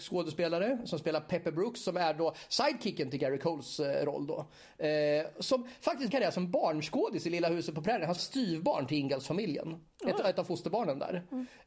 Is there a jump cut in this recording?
yes; 2 cuts; at 6.1 s, 8.2 s

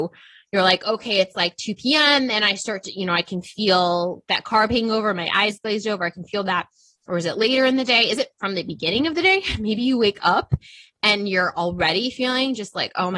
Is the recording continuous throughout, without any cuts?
yes; 0 cuts

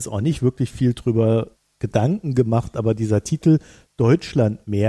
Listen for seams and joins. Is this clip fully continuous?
yes; 0 cuts

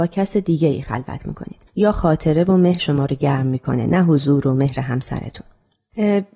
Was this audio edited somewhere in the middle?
yes; 2 cuts; at 1.7 s, 2.8 s

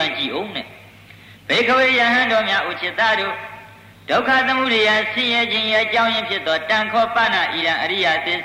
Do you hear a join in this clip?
no; 0 cuts

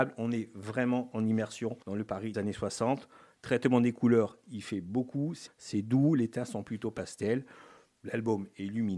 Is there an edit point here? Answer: yes; 3 cuts; at 1.8 s, 2.3 s, 5.5 s

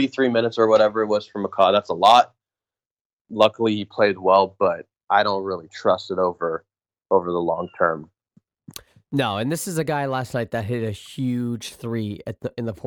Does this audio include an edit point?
no; 0 cuts

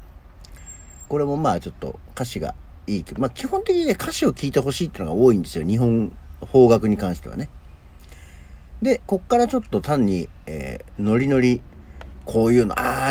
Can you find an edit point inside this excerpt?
yes; 2 cuts; at 1.1 s, 9.1 s

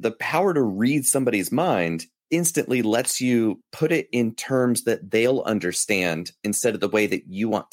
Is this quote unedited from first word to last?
yes; 0 cuts

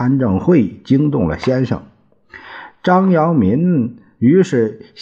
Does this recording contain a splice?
no; 0 cuts

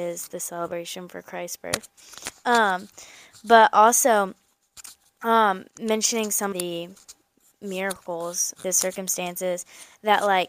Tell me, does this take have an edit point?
yes; 3 cuts; at 5.7 s, 6.5 s, 8.6 s

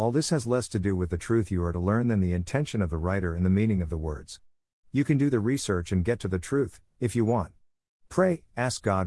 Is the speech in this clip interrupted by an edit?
no; 0 cuts

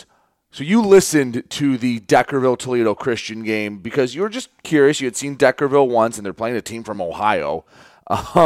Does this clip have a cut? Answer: no; 0 cuts

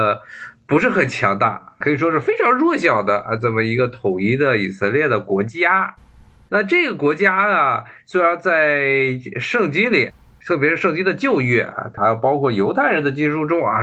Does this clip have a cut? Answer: no; 0 cuts

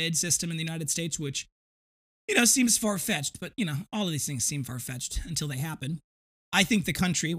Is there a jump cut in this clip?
no; 0 cuts

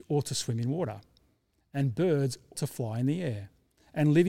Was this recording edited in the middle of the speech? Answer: yes; 1 cut; at 2.5 s

